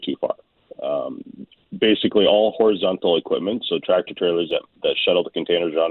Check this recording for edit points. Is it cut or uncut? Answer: uncut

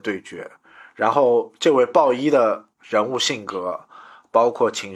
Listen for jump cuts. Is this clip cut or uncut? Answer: cut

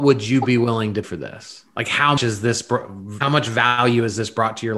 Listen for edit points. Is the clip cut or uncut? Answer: cut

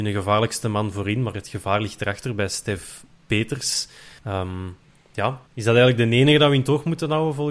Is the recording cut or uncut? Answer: cut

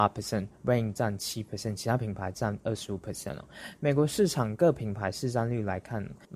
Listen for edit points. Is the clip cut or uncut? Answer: uncut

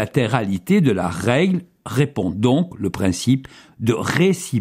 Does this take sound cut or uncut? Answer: uncut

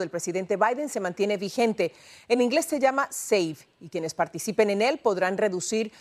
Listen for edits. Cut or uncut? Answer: uncut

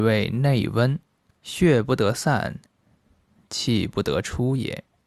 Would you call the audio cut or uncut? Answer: cut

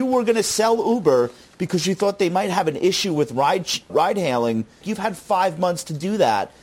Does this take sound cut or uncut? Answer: cut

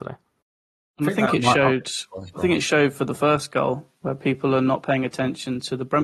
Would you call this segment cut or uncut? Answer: cut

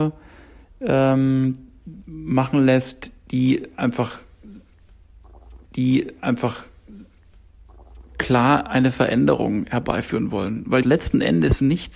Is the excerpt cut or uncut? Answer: cut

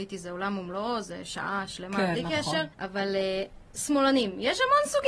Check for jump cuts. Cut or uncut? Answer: cut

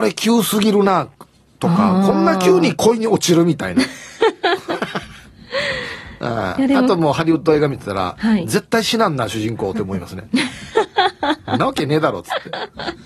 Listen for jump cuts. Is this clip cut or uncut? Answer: uncut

